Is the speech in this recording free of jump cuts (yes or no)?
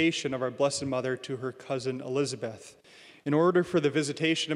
yes